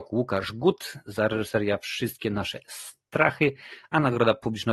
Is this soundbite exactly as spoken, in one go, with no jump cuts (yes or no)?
yes